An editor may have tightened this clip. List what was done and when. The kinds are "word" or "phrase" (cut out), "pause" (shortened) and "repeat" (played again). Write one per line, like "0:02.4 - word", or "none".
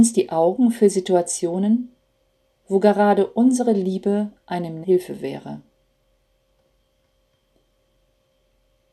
0:04.8 - word